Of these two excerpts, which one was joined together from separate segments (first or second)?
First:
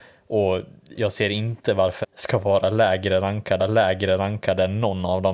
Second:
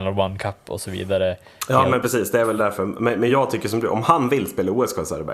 first